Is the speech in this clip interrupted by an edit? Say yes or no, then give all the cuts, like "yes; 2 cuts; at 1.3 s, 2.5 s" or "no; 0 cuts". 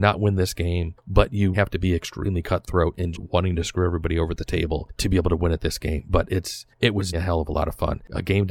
yes; 3 cuts; at 1.5 s, 3.1 s, 7.1 s